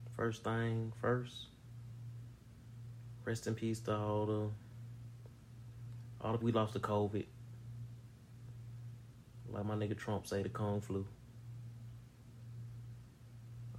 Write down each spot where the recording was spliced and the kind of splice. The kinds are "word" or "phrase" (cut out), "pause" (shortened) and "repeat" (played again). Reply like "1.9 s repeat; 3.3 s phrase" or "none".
6.4 s word